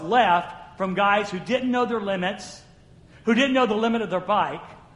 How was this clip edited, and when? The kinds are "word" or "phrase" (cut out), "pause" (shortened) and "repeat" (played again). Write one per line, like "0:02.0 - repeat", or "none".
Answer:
none